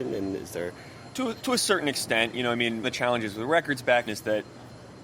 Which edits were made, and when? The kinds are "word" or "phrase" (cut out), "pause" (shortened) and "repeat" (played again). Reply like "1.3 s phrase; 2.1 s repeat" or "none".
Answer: 2.8 s word; 4.1 s word